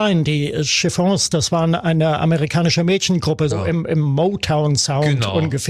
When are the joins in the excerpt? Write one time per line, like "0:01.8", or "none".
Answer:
0:03.5